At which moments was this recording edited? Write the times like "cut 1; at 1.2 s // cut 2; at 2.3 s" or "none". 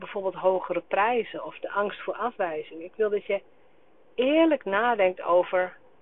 none